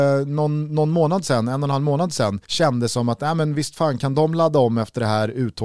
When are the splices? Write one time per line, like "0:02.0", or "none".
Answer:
0:02.4